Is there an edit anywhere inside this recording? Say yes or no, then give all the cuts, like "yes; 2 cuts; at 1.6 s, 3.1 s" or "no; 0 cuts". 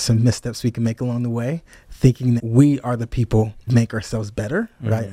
yes; 2 cuts; at 2.4 s, 3.7 s